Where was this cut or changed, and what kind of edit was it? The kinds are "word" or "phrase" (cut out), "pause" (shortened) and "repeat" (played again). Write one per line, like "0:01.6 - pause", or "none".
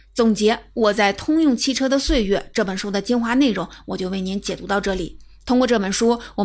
none